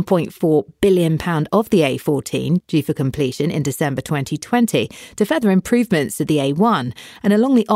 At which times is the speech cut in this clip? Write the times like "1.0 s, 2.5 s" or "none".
1.5 s